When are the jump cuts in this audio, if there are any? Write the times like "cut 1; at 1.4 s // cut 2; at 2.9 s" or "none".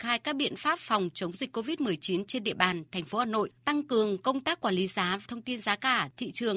cut 1; at 3.6 s // cut 2; at 5.3 s